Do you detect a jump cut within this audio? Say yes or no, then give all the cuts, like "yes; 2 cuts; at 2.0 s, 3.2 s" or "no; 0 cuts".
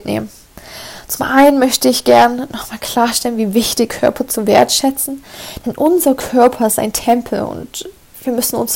yes; 1 cut; at 3.9 s